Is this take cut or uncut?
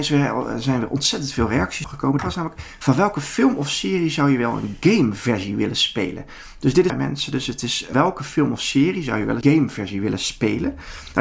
cut